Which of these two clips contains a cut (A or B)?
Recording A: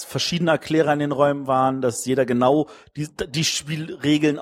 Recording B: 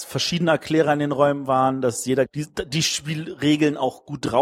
B